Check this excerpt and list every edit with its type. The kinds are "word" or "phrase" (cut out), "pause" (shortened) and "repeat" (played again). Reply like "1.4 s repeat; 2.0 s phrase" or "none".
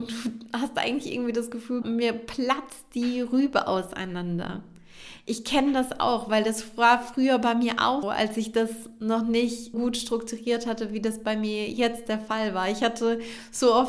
1.8 s word; 8.0 s word; 9.7 s word

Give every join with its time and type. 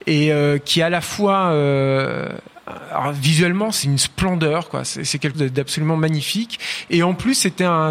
3.8 s word; 5.3 s word

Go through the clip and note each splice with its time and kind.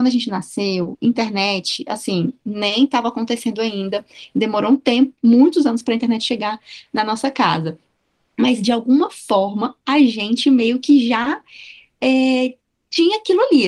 none

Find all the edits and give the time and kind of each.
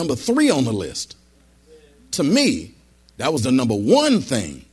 none

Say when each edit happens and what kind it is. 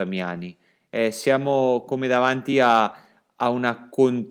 none

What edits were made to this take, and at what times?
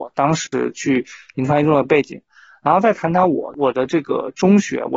none

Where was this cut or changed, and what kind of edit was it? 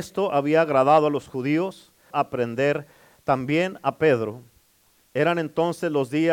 2.1 s word

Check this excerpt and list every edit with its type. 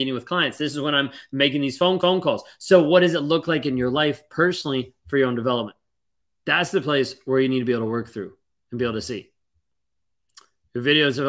2.0 s repeat; 6.2 s pause

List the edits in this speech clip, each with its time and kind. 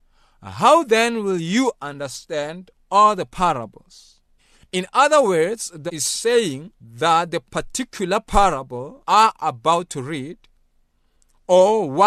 4.4 s pause; 5.9 s phrase; 6.8 s pause; 9.0 s word

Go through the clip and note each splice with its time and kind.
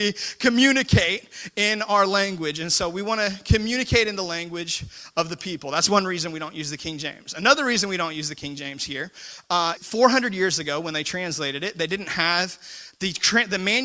9.8 s word

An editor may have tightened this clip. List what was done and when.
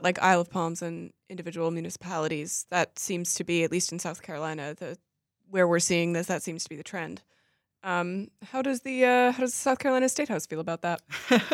none

